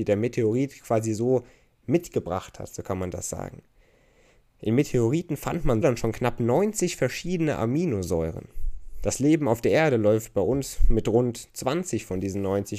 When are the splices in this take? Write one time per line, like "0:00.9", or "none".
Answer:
0:05.8